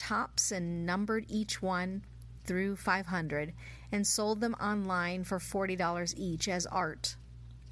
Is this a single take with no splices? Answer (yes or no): yes